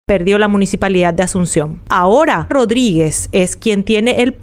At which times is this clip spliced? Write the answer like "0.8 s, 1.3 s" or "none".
2.5 s